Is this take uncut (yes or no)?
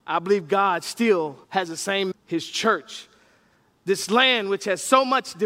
no